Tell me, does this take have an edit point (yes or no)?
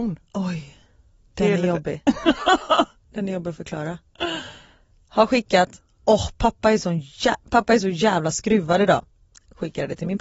no